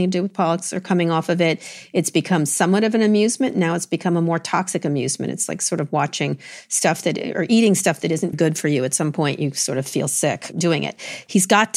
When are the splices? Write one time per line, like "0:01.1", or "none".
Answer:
0:08.3
0:10.5